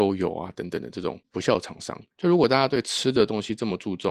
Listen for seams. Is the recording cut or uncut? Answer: cut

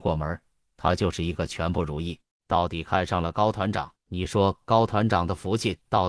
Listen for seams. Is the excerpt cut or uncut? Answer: cut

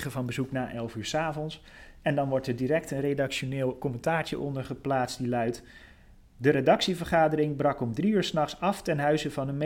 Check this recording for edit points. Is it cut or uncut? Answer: uncut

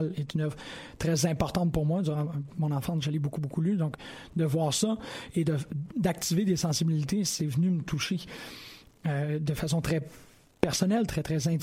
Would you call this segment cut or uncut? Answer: uncut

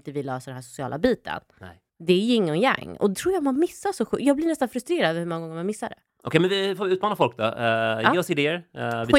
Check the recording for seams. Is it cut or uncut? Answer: cut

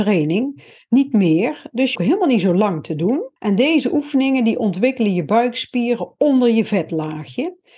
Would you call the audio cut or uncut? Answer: cut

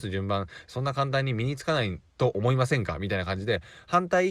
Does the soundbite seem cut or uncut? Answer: cut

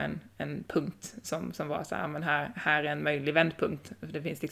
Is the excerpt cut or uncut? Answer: uncut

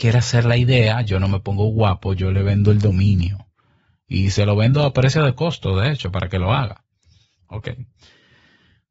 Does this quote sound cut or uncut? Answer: uncut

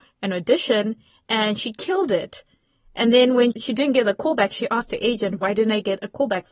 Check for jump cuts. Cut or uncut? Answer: uncut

